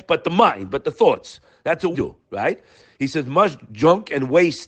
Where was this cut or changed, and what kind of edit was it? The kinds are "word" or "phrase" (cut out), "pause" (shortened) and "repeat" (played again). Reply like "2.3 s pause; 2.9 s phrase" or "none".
1.9 s word